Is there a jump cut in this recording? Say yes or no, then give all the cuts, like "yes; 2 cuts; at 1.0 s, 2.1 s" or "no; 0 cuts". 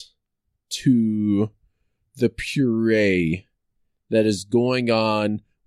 no; 0 cuts